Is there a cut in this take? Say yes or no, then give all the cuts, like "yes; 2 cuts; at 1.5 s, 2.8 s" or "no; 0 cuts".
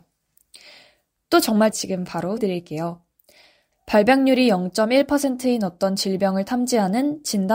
yes; 2 cuts; at 1.7 s, 2.4 s